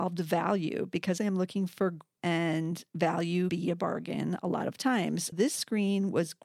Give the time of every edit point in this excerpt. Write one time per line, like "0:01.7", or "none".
0:01.2
0:02.2
0:03.5
0:05.3